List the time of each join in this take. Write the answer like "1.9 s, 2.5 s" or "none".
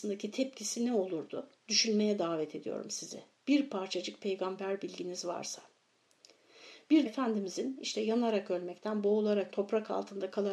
1.6 s, 7.1 s, 9.5 s